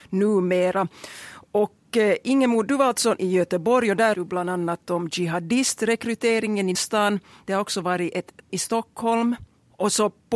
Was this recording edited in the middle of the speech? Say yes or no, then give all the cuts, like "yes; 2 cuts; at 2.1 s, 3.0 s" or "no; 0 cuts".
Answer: yes; 4 cuts; at 3.2 s, 4.1 s, 6.7 s, 8.5 s